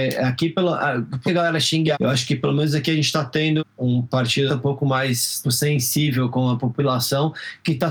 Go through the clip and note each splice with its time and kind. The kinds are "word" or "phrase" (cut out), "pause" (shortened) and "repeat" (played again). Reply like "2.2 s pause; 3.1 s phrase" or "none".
1.3 s word; 1.9 s word; 3.6 s word; 4.5 s word; 5.4 s word